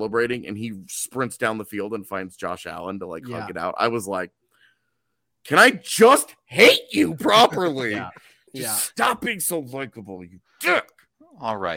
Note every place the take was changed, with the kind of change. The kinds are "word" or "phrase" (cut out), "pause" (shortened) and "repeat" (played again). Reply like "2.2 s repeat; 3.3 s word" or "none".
none